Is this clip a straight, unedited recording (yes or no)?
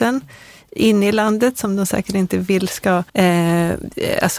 no